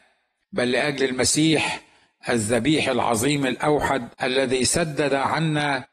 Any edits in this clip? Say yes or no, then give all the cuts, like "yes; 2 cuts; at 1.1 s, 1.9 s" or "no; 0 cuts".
yes; 1 cut; at 4.1 s